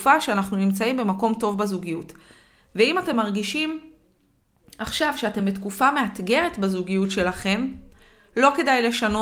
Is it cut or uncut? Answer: uncut